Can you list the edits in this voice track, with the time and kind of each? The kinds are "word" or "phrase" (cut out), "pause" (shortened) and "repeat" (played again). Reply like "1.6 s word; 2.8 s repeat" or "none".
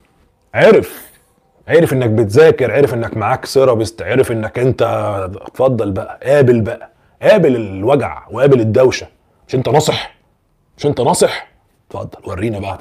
none